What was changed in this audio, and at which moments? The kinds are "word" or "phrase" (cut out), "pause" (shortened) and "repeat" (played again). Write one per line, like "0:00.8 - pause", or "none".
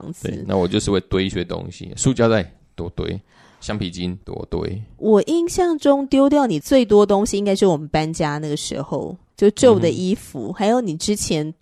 none